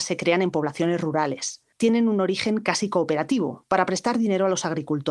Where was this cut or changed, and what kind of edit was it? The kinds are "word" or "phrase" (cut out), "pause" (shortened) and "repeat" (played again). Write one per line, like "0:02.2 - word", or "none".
0:01.7 - pause